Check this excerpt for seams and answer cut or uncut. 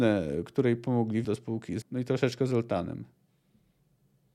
cut